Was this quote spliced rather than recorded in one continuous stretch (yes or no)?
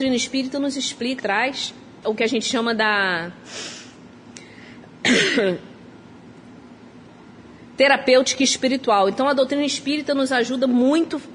yes